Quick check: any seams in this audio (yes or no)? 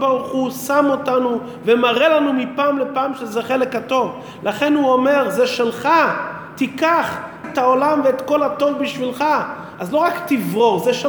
yes